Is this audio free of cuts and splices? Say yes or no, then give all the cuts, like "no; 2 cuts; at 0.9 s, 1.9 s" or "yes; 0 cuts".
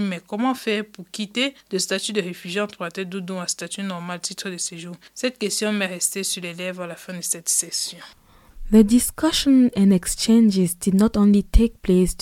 yes; 0 cuts